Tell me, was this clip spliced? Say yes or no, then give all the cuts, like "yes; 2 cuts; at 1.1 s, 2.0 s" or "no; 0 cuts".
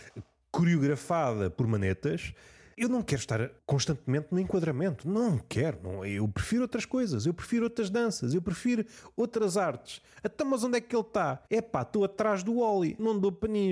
yes; 1 cut; at 11.5 s